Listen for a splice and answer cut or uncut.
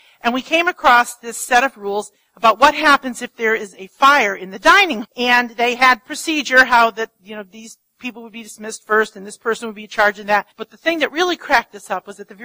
cut